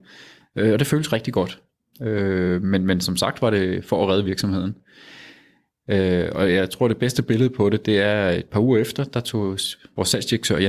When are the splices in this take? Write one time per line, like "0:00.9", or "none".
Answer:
none